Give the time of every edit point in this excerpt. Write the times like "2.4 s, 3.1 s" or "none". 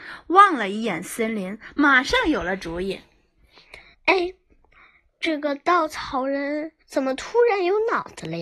3.9 s, 6.8 s